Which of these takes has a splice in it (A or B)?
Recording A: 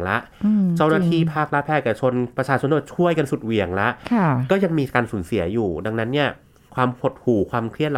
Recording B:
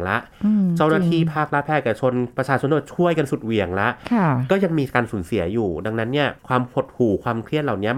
B